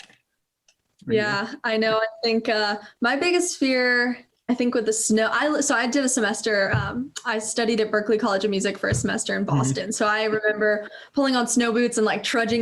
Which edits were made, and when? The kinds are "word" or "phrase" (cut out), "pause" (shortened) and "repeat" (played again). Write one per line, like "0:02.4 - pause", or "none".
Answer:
none